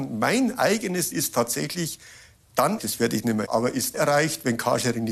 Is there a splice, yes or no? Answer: yes